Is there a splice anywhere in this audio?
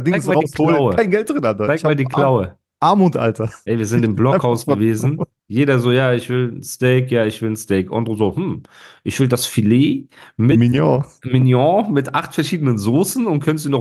no; 0 cuts

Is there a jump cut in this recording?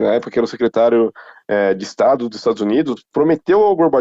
no; 0 cuts

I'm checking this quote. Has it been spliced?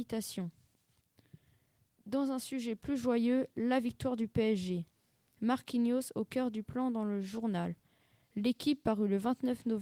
no; 0 cuts

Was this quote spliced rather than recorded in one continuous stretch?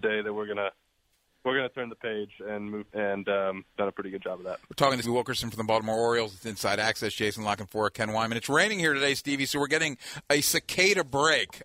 yes; 5 cuts; at 2.4 s, 2.9 s, 3.7 s, 4.6 s, 5.0 s

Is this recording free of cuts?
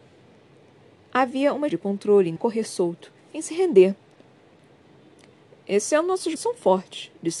no; 3 cuts; at 1.7 s, 2.4 s, 6.4 s

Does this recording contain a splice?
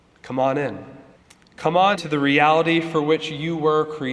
yes; 2 cuts; at 1.2 s, 2.0 s

